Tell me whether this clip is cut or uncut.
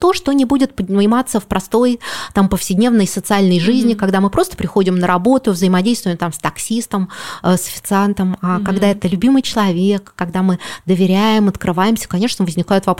uncut